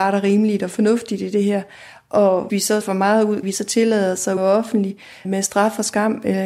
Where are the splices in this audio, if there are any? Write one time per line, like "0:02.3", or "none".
0:02.5
0:02.8
0:03.4
0:04.4
0:05.2